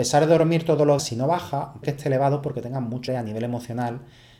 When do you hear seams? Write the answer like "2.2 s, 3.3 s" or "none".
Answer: 1.0 s, 1.8 s, 3.1 s